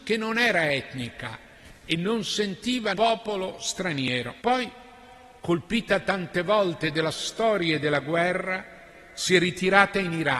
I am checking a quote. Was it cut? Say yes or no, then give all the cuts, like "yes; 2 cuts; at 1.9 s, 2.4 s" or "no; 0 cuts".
yes; 3 cuts; at 2.9 s, 4.4 s, 6.9 s